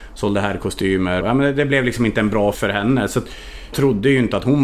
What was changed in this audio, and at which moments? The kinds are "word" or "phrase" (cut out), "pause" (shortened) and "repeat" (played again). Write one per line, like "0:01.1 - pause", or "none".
0:01.2 - word
0:02.5 - word
0:03.7 - word